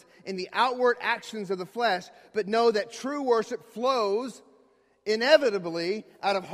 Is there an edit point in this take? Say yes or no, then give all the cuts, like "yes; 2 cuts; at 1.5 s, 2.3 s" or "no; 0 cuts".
no; 0 cuts